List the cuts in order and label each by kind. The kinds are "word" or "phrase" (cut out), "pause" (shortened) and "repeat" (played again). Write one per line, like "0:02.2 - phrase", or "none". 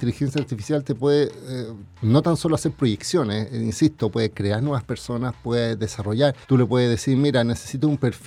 0:06.4 - pause